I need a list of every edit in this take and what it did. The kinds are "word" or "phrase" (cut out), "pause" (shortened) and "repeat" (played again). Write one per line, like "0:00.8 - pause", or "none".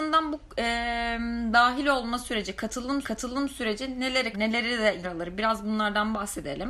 0:03.0 - repeat
0:04.3 - word
0:05.0 - word